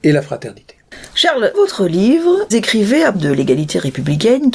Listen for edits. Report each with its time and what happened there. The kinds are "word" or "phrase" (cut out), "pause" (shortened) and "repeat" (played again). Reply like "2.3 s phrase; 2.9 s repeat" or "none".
1.5 s word; 2.5 s word; 3.1 s word

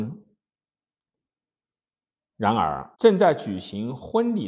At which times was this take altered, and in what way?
2.9 s pause

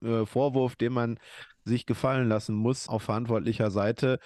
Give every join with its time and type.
2.9 s word

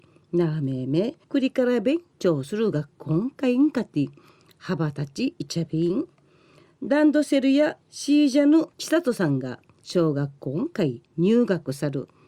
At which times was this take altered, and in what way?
1.2 s pause; 7.8 s pause; 8.7 s pause; 11.0 s pause

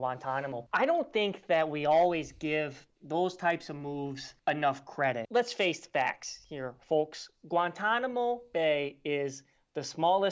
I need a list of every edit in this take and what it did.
3.0 s pause

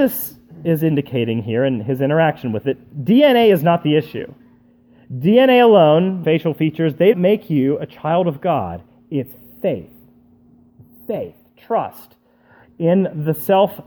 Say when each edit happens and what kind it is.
2.6 s word; 6.2 s word; 7.1 s word

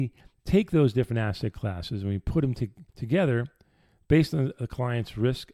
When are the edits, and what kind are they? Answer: 2.9 s pause

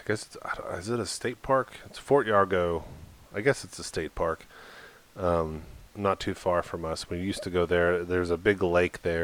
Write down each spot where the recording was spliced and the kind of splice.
5.9 s pause

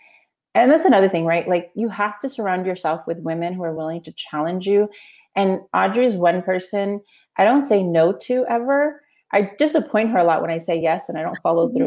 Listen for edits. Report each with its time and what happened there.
none

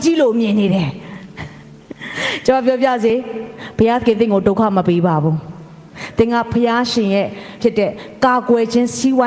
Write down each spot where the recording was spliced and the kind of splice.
7.6 s word

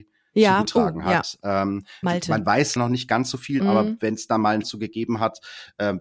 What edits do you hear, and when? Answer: 2.0 s word; 2.8 s word; 3.6 s word; 4.6 s word

